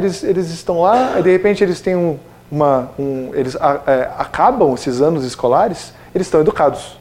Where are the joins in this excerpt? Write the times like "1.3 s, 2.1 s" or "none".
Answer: none